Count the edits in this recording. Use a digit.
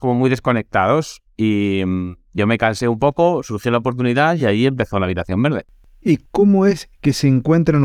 0